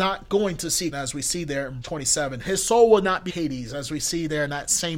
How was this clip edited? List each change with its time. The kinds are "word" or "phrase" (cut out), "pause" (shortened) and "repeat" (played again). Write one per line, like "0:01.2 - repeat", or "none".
0:00.9 - word
0:01.8 - word
0:03.3 - phrase